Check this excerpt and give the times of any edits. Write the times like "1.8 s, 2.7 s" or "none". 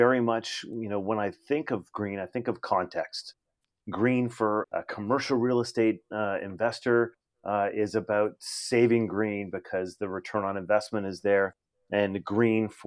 4.6 s